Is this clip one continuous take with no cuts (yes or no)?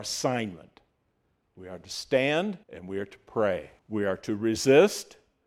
no